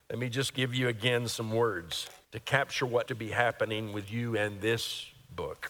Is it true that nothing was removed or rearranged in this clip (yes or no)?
no